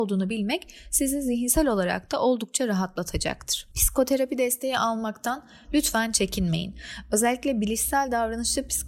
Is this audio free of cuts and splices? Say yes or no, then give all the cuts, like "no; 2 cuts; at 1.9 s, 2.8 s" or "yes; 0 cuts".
yes; 0 cuts